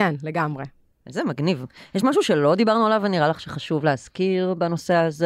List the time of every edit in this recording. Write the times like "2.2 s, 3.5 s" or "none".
none